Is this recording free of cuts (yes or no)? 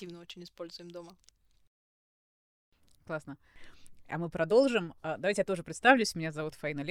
yes